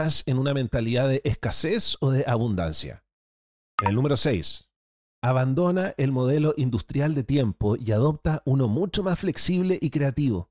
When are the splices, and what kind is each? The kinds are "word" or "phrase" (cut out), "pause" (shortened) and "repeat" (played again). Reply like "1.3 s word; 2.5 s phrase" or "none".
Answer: none